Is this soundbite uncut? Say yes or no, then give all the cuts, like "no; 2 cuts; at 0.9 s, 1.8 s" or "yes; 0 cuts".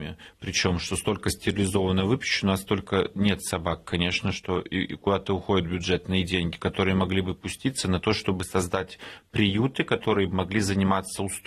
yes; 0 cuts